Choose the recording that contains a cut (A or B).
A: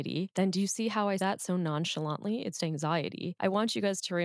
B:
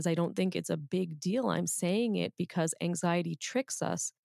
A